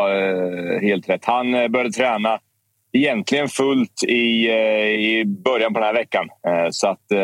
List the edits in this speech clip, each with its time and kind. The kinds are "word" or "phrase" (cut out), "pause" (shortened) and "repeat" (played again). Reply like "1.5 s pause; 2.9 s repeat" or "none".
none